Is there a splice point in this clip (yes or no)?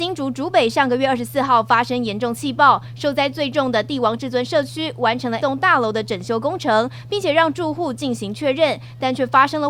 yes